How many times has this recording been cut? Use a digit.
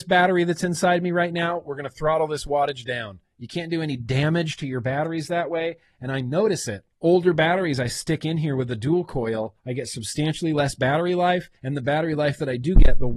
3